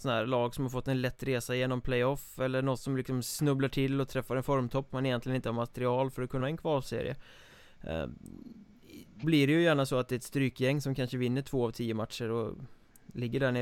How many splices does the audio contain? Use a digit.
3